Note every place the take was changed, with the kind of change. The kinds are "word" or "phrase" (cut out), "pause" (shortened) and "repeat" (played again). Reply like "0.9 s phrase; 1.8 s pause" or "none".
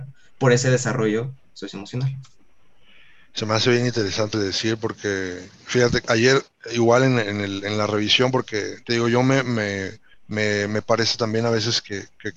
4.3 s phrase; 10.1 s pause